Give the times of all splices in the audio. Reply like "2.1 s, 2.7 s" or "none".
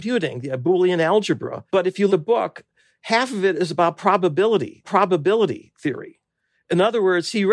1.7 s, 2.1 s, 4.8 s